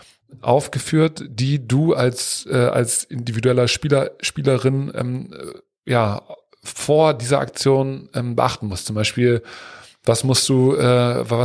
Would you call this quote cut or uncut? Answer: uncut